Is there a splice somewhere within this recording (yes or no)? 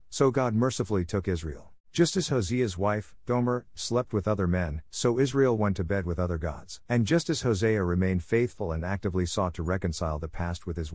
yes